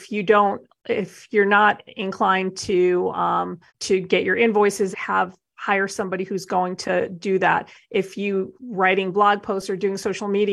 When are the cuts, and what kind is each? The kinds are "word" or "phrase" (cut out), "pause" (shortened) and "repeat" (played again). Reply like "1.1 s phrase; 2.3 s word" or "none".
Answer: 3.7 s pause; 4.9 s word; 8.6 s word